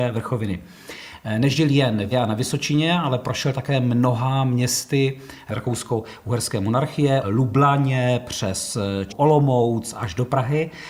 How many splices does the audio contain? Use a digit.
3